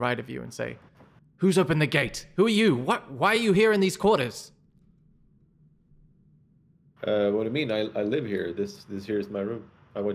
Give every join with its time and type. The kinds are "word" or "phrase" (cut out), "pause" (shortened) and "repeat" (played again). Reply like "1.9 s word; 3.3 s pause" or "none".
none